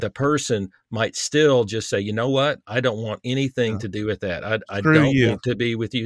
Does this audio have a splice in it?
no; 0 cuts

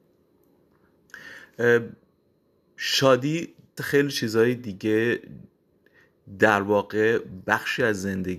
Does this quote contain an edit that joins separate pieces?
yes; 1 cut; at 3.8 s

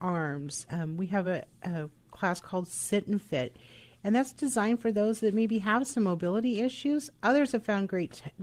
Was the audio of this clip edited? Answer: no; 0 cuts

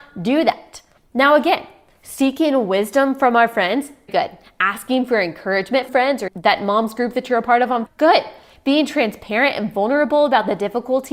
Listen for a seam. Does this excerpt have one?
yes; 4 cuts; at 4.1 s, 5.9 s, 6.3 s, 7.9 s

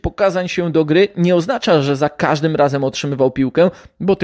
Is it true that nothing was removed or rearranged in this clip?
yes; 0 cuts

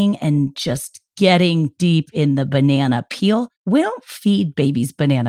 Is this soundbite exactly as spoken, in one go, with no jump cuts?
yes; 0 cuts

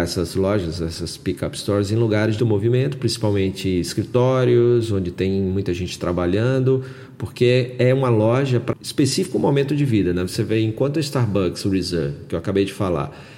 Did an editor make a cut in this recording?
yes; 2 cuts; at 2.4 s, 8.7 s

